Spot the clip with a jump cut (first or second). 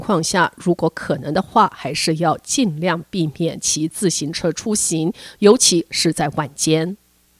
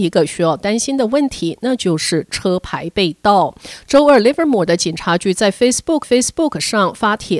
second